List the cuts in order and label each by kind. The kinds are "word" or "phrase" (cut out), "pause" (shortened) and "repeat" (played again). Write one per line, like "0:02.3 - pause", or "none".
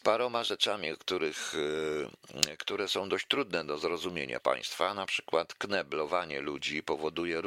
0:04.4 - word